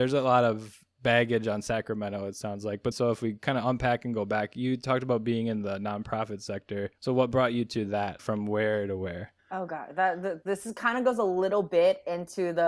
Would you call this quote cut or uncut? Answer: cut